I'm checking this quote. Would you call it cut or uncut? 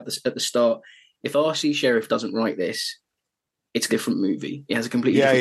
cut